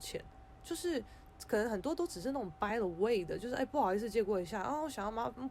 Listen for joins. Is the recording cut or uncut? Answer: uncut